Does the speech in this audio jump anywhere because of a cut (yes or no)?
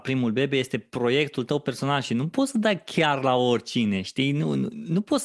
no